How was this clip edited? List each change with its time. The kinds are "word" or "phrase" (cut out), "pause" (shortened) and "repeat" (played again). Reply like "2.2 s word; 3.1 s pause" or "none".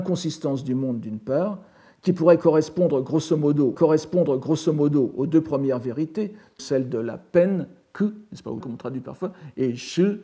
3.8 s repeat; 6.6 s word; 8.6 s phrase